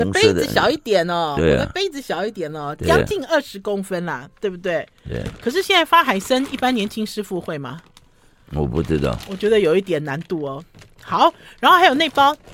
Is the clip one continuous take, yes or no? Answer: yes